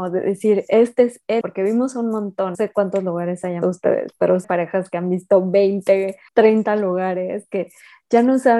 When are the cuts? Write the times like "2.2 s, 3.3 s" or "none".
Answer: 1.4 s, 2.5 s, 3.6 s, 4.4 s, 6.3 s